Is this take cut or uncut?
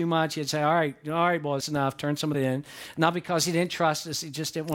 cut